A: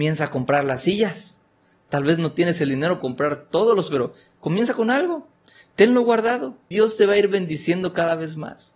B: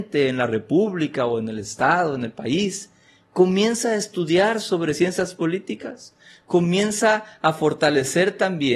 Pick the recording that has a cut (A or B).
A